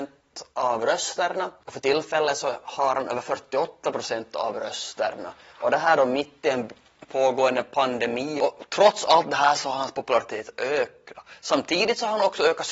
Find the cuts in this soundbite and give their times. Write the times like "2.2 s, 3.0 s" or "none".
none